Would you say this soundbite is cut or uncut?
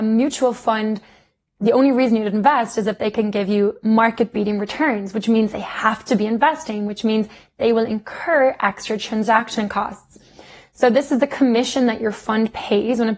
uncut